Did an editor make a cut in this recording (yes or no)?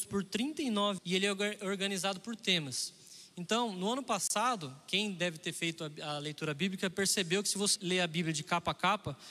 yes